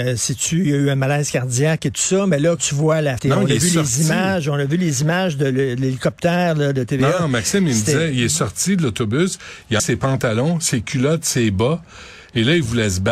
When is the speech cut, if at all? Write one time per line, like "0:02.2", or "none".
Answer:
0:02.6
0:03.2
0:09.8

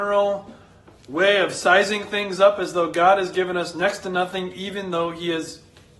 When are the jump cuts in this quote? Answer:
none

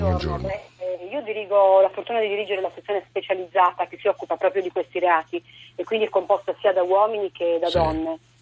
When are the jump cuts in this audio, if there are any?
none

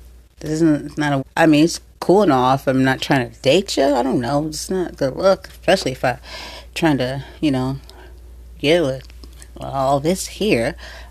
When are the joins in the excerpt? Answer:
0:01.2

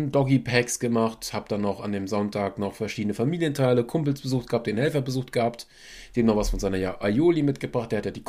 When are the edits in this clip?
none

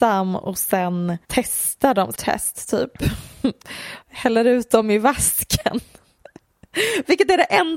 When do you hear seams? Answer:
0:01.2
0:02.1
0:04.0

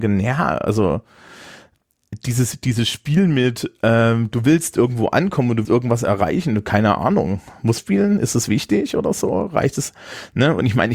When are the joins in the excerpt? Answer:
0:05.6
0:07.8

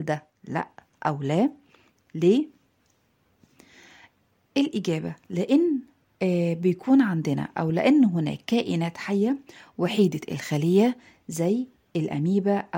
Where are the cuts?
none

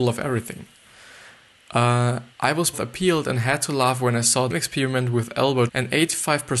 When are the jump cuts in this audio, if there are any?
0:02.3
0:02.7
0:04.5
0:05.7

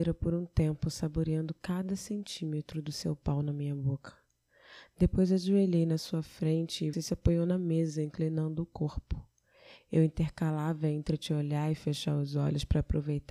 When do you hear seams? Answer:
0:06.9

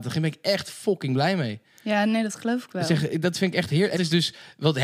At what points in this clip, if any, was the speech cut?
0:04.0

